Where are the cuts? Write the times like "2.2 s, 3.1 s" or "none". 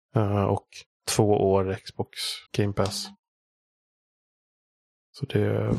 2.5 s

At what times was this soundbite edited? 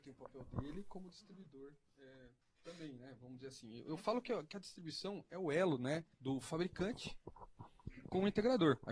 6.1 s

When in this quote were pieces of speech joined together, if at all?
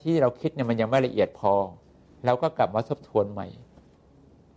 2.1 s

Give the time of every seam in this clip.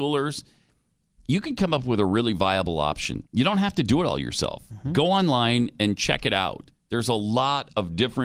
3.3 s, 6.7 s

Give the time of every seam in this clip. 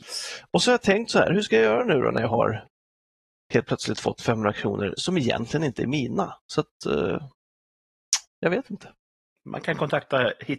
none

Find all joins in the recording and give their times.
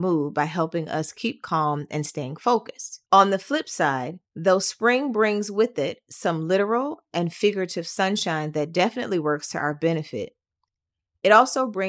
3.1 s, 4.2 s

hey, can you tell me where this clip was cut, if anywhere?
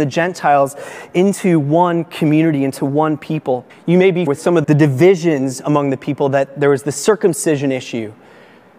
3.7 s, 4.3 s, 4.6 s

